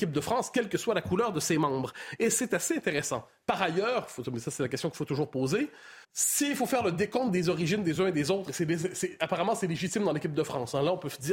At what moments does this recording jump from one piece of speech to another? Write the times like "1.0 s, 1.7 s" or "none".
6.0 s